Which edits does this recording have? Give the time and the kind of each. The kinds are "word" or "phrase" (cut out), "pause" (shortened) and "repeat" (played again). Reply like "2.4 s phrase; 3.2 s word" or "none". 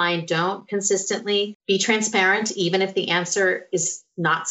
1.6 s pause